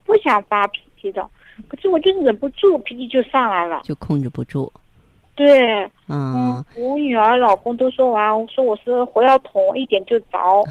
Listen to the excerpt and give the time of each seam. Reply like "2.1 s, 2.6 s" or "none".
none